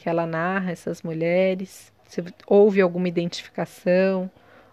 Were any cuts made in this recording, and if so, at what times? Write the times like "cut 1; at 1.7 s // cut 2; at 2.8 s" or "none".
cut 1; at 2.0 s